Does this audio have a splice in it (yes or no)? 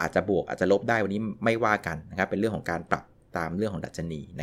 no